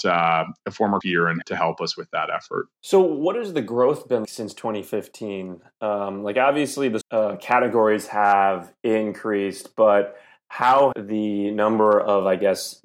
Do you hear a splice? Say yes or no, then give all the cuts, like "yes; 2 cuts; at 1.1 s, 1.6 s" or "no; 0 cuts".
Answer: yes; 6 cuts; at 1.0 s, 1.4 s, 2.7 s, 4.2 s, 7.0 s, 10.9 s